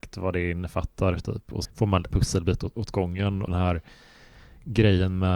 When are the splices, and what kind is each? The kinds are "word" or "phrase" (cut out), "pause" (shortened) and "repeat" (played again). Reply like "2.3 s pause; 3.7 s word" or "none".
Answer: 1.6 s word; 2.1 s word; 2.7 s word; 3.5 s word